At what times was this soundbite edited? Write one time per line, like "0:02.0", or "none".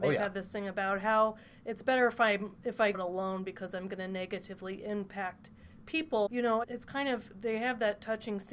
0:02.9
0:06.3
0:06.6

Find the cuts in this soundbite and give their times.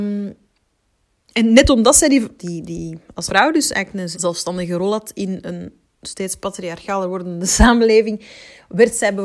0:02.4
0:03.3
0:04.1

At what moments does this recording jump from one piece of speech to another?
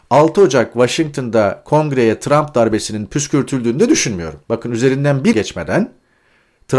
0:04.4
0:05.3

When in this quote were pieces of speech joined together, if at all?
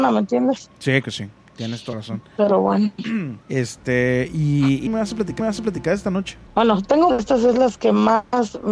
0:01.0
0:01.9
0:03.4
0:04.9
0:05.4
0:06.5
0:07.1

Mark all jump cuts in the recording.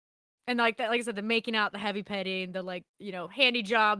0:02.9

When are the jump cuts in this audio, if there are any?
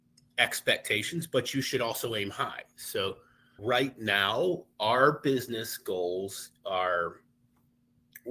0:03.6

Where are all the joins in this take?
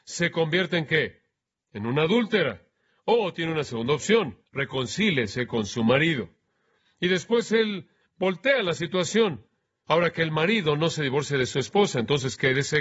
0:04.5

